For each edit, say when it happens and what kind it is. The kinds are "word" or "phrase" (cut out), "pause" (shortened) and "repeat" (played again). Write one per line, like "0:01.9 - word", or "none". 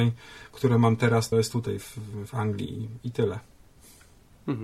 0:01.3 - word
0:02.3 - word